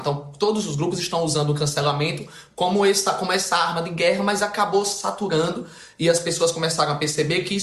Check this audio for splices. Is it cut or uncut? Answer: uncut